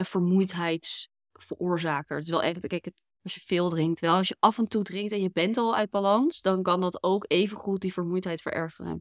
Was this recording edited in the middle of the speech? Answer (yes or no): yes